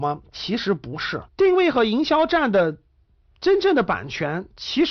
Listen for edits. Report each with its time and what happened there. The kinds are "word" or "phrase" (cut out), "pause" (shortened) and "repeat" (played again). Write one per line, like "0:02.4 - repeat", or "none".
0:01.3 - pause

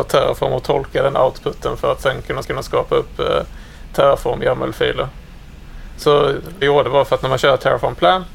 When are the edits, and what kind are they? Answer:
0:02.4 - repeat
0:06.6 - phrase

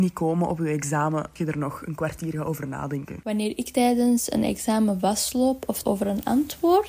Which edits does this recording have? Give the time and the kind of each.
0:01.4 - word
0:05.8 - word

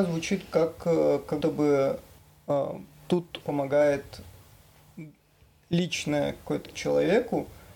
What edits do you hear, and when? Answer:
0:01.4 - word
0:02.2 - pause
0:03.4 - word
0:06.7 - word

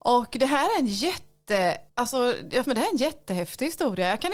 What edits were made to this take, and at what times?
0:01.9 - pause
0:02.6 - word

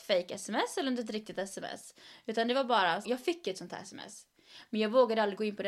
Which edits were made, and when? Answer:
0:03.0 - phrase

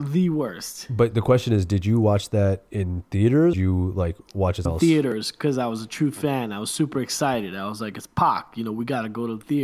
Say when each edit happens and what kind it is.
0:03.5 - phrase
0:04.7 - word

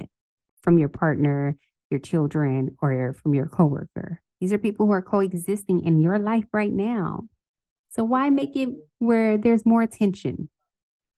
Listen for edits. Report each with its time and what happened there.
0:04.3 - pause
0:08.9 - pause

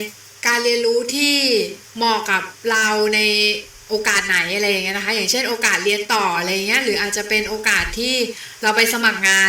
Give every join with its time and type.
0:02.6 - pause

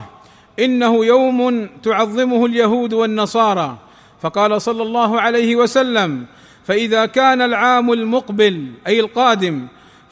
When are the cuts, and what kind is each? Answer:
none

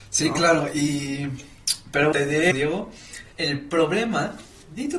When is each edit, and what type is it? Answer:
0:02.1 - word
0:02.5 - word
0:03.3 - pause

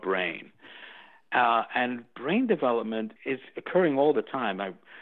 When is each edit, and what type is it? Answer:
0:03.2 - pause

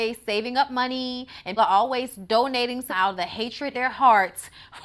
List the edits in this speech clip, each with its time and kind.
0:01.6 - word
0:02.9 - word
0:03.7 - word

